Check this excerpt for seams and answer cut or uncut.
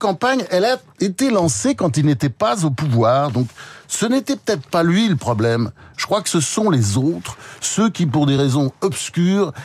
uncut